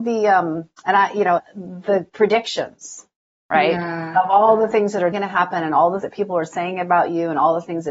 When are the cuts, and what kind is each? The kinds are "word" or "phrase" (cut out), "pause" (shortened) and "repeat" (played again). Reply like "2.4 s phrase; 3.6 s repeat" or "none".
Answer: 1.4 s word; 5.1 s word; 6.0 s word